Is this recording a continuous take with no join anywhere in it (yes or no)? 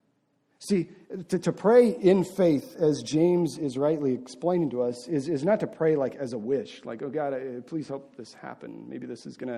yes